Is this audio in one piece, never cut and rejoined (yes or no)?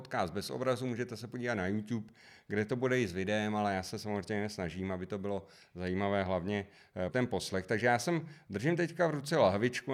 no